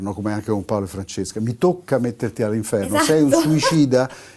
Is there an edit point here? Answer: no; 0 cuts

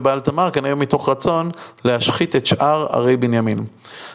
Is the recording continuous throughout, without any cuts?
yes; 0 cuts

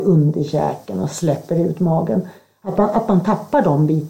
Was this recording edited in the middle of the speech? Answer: no; 0 cuts

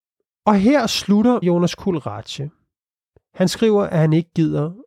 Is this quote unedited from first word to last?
no; 1 cut; at 1.4 s

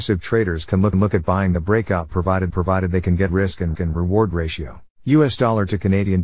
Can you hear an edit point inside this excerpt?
yes; 5 cuts; at 0.9 s, 2.5 s, 3.3 s, 3.7 s, 4.9 s

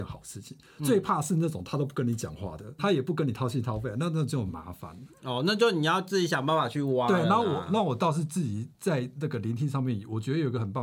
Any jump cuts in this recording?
yes; 1 cut; at 2.8 s

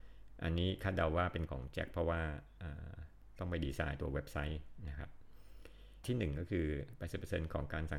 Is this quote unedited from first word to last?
no; 2 cuts; at 1.5 s, 6.0 s

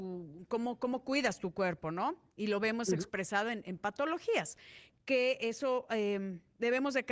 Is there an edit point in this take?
no; 0 cuts

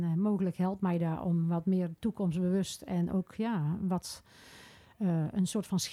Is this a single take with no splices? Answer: yes; 0 cuts

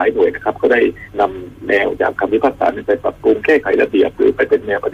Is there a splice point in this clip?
yes; 1 cut; at 1.1 s

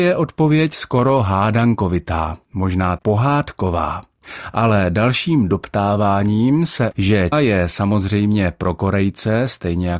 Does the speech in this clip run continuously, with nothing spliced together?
no; 3 cuts; at 3.0 s, 6.9 s, 7.3 s

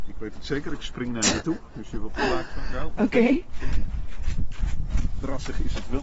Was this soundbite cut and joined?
no; 0 cuts

